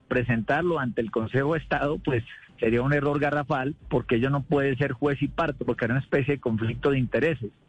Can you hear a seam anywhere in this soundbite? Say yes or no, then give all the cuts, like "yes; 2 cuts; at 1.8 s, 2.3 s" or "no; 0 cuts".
yes; 2 cuts; at 2.4 s, 3.8 s